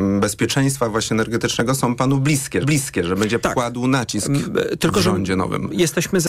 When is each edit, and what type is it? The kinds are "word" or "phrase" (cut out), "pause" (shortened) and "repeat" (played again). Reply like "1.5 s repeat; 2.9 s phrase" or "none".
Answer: 2.6 s repeat; 3.4 s phrase